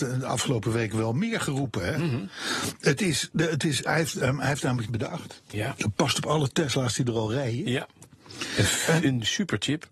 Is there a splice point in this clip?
yes; 1 cut; at 4.9 s

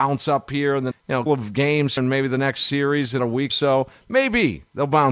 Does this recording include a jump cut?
yes; 5 cuts; at 0.9 s, 1.3 s, 2.0 s, 3.2 s, 3.5 s

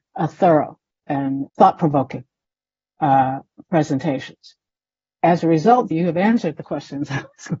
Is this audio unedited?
no; 4 cuts; at 1.0 s, 1.5 s, 5.9 s, 6.6 s

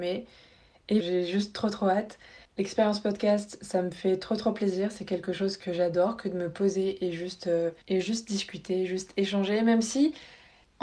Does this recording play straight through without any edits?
no; 3 cuts; at 1.0 s, 2.4 s, 7.8 s

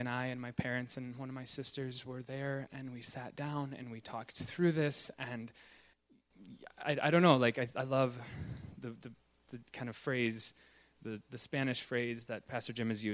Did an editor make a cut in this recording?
no; 0 cuts

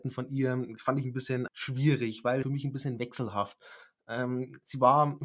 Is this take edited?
yes; 2 cuts; at 1.5 s, 2.4 s

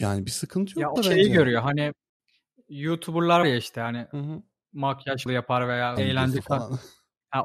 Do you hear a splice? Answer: yes; 4 cuts; at 1.0 s, 3.4 s, 5.3 s, 6.0 s

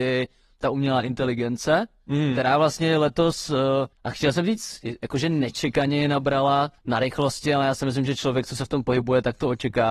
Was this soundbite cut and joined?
yes; 2 cuts; at 3.9 s, 6.8 s

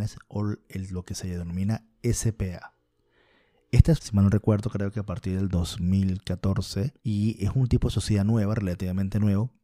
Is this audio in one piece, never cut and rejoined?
no; 2 cuts; at 4.0 s, 7.0 s

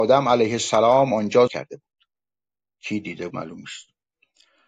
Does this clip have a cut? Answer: yes; 2 cuts; at 1.5 s, 3.3 s

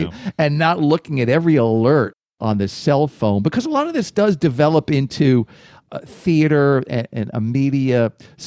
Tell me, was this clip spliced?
no; 0 cuts

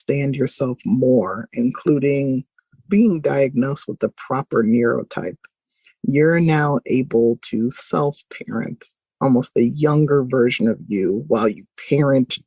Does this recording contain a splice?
no; 0 cuts

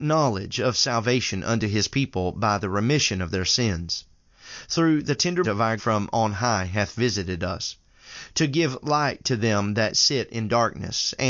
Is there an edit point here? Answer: yes; 2 cuts; at 5.4 s, 5.8 s

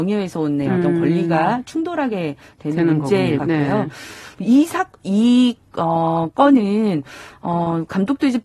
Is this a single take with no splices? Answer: no; 1 cut; at 3.4 s

